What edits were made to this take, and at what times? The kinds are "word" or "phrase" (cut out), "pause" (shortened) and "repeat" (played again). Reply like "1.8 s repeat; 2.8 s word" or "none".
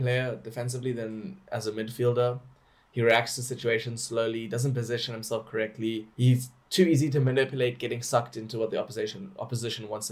6.1 s pause